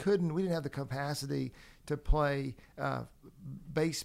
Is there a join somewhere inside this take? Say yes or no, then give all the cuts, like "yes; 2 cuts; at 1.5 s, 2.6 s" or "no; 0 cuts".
no; 0 cuts